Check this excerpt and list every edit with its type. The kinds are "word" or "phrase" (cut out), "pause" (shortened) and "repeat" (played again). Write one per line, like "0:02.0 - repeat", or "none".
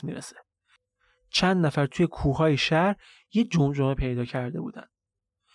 none